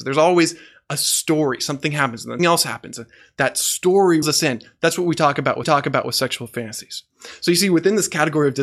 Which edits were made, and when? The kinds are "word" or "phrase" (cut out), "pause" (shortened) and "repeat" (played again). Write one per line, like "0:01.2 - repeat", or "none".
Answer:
0:02.4 - word
0:04.2 - word
0:05.6 - repeat